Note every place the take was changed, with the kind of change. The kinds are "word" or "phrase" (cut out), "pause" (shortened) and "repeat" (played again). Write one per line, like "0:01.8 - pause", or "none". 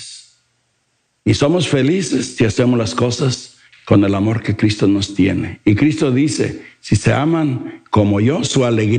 0:03.7 - pause